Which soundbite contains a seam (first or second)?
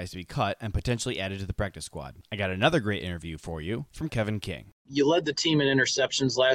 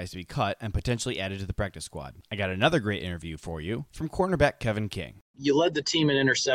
first